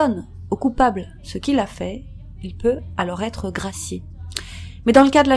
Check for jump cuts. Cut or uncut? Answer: uncut